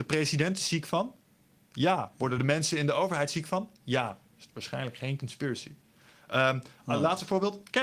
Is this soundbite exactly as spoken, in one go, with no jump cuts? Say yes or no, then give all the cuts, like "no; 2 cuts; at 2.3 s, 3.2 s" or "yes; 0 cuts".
yes; 0 cuts